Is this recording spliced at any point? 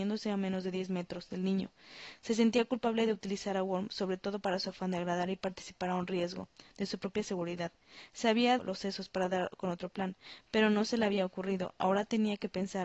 yes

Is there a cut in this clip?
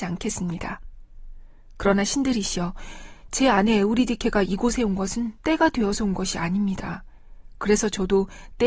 yes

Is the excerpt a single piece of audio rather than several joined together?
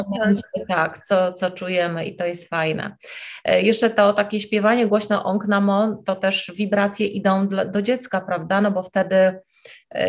yes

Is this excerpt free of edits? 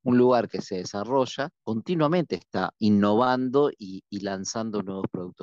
no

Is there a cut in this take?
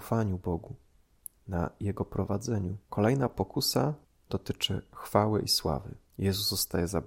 yes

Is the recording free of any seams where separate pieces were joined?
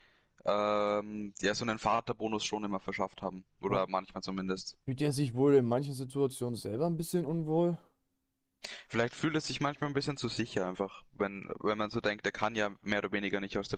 no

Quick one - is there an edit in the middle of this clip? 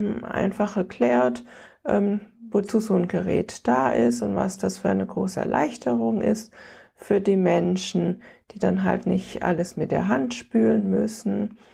no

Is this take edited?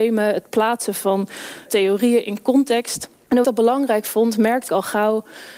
yes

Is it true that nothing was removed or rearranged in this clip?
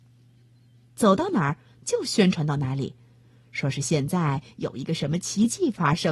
yes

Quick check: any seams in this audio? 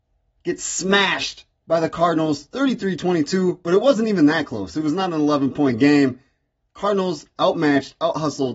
no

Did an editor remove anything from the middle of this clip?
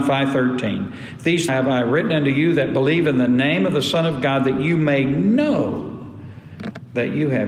yes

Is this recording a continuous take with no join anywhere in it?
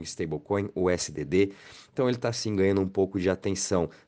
yes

